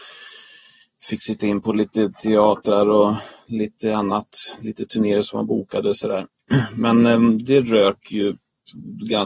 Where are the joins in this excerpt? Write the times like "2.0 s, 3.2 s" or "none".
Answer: none